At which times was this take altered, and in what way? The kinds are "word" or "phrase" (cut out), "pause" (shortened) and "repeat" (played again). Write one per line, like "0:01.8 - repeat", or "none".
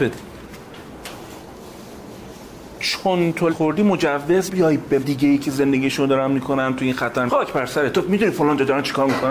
0:03.5 - word
0:04.5 - word
0:05.0 - word
0:07.3 - word